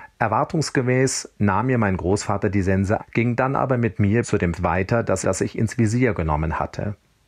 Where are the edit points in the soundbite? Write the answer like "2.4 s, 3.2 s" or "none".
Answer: 3.0 s, 4.2 s, 4.5 s, 5.2 s